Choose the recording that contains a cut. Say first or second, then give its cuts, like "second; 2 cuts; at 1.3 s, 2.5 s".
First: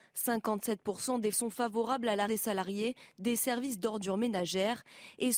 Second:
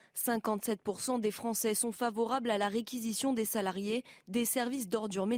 first; 2 cuts; at 1.3 s, 2.3 s